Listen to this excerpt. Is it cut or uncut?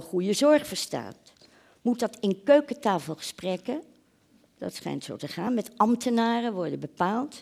uncut